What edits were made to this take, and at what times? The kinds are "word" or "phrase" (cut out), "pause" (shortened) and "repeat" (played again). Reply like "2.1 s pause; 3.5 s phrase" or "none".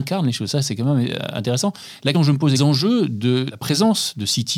2.1 s word; 2.6 s phrase; 3.5 s word